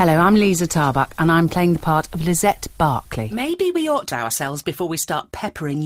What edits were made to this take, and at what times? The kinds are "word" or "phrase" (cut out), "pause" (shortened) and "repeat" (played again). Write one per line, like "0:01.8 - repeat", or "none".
0:04.1 - word